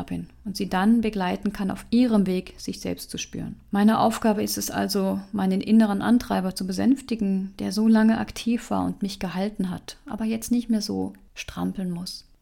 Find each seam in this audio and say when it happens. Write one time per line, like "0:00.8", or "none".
0:03.7